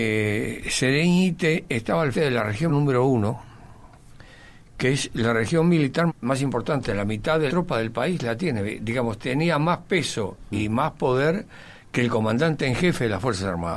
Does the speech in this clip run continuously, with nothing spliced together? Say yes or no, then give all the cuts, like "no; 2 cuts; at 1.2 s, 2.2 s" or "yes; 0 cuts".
no; 4 cuts; at 2.1 s, 2.7 s, 6.1 s, 7.5 s